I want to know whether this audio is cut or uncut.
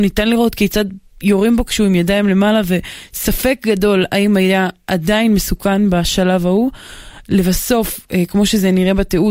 uncut